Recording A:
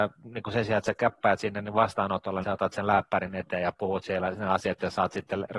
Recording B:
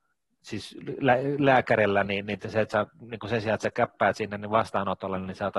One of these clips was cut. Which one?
A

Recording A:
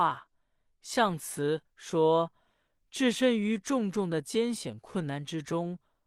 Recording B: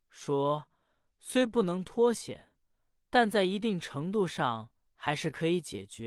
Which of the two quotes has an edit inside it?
A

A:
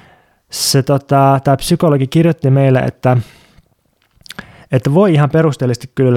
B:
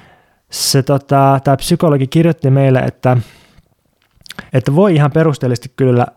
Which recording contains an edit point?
B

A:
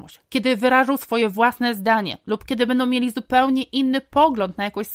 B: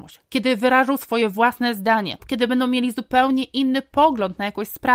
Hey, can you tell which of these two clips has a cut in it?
B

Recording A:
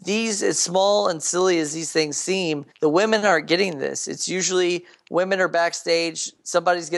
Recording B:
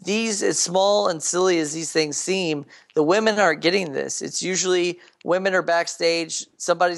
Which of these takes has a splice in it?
A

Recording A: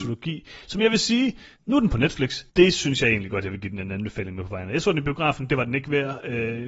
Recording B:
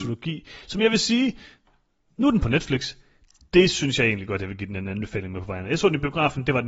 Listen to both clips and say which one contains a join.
A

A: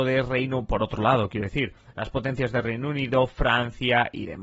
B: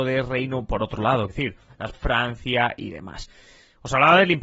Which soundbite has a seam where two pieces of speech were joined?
B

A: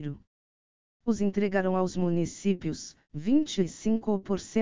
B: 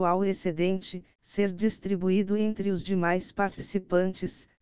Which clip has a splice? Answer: A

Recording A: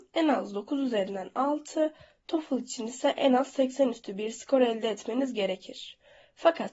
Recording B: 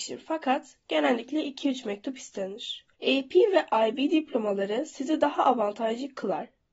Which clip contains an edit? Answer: B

